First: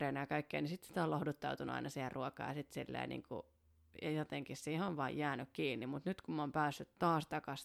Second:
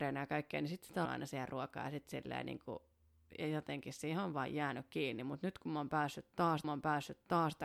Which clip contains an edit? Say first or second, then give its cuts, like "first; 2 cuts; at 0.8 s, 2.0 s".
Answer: second; 2 cuts; at 1.0 s, 6.6 s